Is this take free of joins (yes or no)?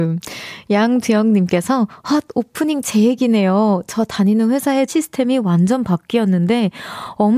no